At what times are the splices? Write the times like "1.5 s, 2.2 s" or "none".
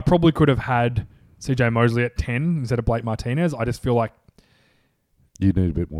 none